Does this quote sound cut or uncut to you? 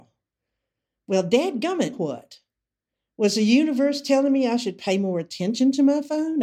cut